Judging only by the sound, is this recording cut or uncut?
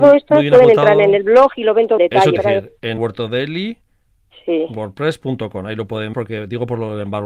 cut